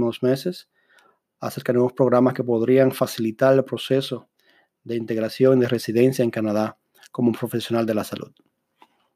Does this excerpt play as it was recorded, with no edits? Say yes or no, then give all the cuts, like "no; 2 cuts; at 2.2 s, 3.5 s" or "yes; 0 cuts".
yes; 0 cuts